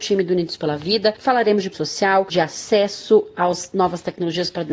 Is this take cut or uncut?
cut